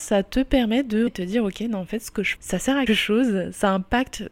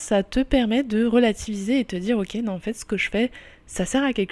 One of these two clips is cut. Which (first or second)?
first